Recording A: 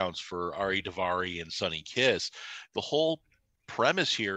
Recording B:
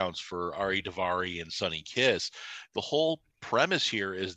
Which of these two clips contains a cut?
B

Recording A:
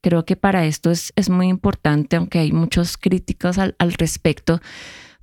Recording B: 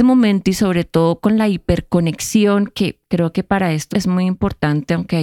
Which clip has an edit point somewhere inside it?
B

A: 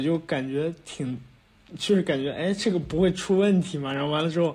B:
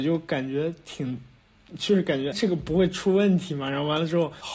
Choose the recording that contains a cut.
B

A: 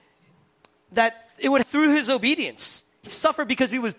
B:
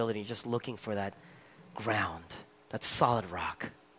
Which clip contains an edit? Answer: A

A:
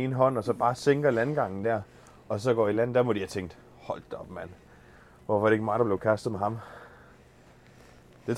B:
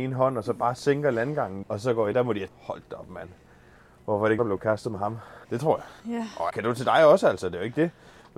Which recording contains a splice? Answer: B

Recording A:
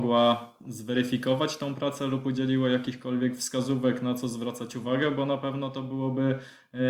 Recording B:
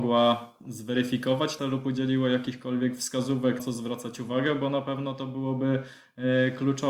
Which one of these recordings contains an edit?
B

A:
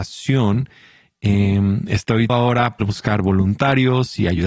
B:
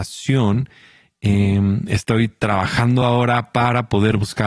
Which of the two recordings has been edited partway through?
A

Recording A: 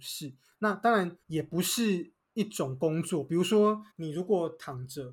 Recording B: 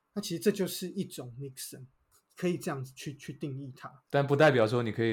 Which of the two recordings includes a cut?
A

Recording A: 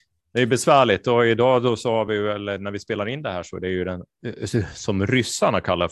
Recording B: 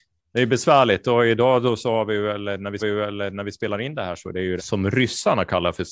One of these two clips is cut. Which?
B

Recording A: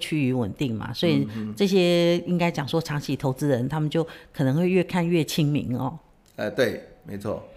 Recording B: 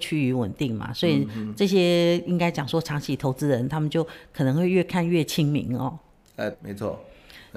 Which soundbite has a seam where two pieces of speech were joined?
B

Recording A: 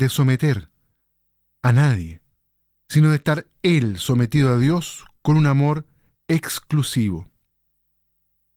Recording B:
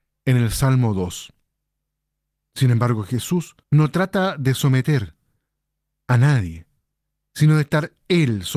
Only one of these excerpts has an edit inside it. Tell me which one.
B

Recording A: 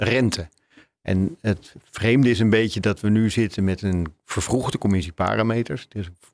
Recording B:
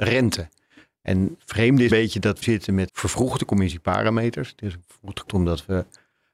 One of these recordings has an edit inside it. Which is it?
B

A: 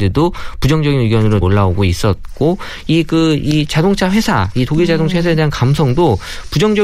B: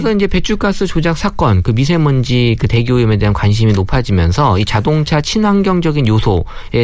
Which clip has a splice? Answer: A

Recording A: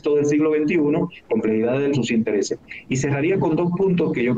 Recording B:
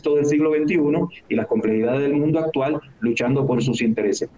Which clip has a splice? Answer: A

